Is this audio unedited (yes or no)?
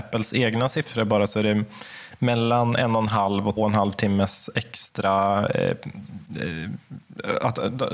no